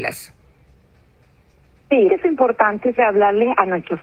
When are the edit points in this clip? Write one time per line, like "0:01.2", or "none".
0:02.1
0:03.0